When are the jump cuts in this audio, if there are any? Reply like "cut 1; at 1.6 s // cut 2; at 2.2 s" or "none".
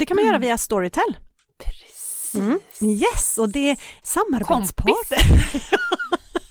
cut 1; at 4.0 s